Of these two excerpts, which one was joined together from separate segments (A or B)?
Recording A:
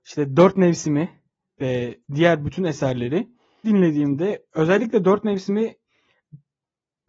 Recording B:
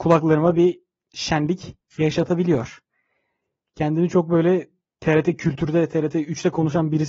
A